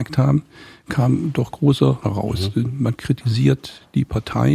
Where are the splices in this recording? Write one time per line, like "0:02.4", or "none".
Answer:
0:02.0

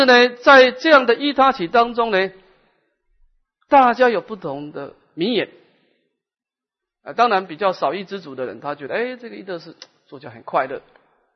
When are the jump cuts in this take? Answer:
none

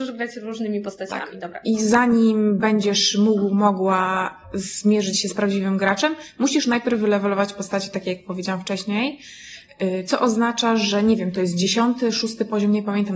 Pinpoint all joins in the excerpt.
none

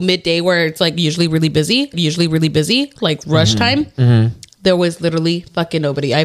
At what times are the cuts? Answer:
0:01.9

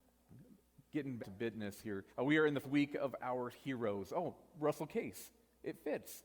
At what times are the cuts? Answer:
0:01.2
0:02.1
0:02.6
0:03.5

